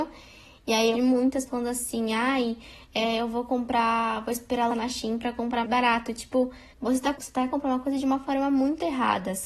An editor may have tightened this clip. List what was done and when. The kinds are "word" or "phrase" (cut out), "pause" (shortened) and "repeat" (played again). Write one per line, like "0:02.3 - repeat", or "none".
0:00.9 - phrase
0:01.5 - word
0:04.7 - word
0:05.6 - word
0:06.7 - pause
0:07.1 - word
0:07.5 - word